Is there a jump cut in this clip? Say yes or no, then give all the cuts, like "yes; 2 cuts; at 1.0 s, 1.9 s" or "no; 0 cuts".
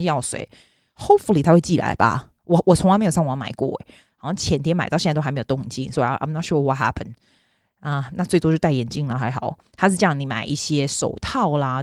no; 0 cuts